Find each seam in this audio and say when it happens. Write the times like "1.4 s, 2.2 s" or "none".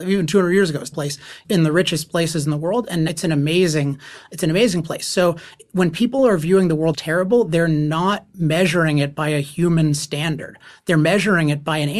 0.9 s, 1.4 s, 3.1 s, 6.9 s